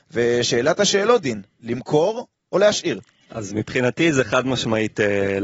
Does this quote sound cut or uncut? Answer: uncut